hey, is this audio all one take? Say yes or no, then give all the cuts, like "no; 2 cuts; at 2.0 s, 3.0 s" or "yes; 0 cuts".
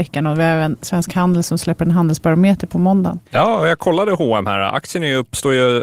no; 1 cut; at 3.3 s